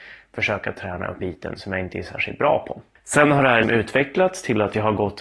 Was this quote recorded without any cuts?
no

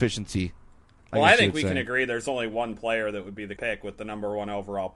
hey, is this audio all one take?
no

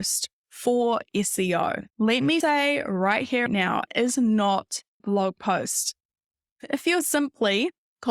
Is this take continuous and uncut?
no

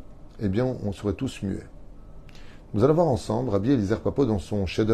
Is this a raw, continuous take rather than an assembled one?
yes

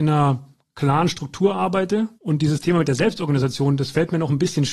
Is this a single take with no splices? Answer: no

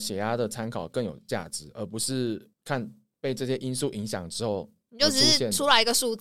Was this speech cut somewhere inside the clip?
yes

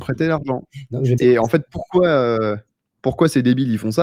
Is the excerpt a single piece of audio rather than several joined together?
no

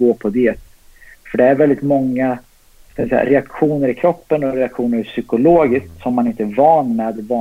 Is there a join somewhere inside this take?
no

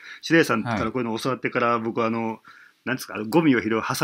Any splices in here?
no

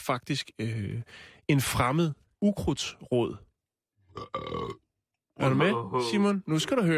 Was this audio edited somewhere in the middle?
yes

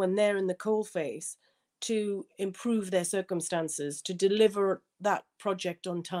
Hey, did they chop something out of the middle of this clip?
no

